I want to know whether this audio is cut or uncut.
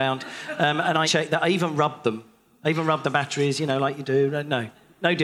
cut